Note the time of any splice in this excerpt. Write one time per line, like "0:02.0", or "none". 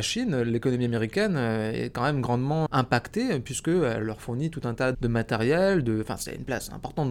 0:02.7
0:04.9